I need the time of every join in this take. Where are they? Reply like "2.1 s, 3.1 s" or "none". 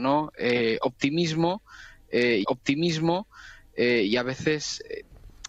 2.4 s